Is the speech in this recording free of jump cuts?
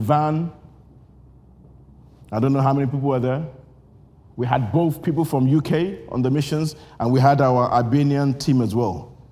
no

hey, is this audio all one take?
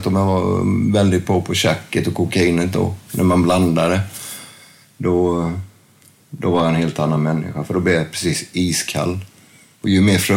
yes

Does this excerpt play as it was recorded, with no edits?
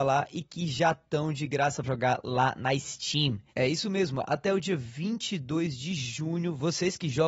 no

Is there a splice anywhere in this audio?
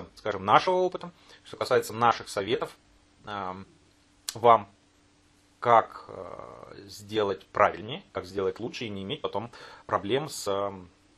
no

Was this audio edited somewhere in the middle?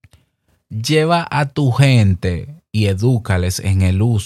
no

